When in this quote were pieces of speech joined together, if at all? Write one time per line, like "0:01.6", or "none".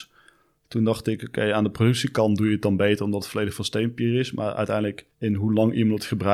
0:05.1